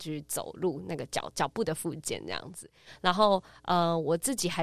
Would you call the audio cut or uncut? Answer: uncut